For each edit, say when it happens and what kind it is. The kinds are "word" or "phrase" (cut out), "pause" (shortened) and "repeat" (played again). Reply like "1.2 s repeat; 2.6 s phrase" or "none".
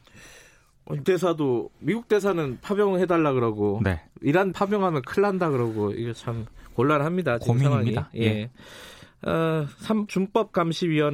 1.0 s word; 4.5 s word; 10.1 s word